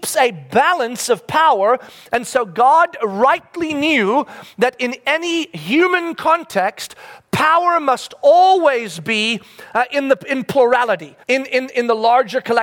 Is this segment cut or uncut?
cut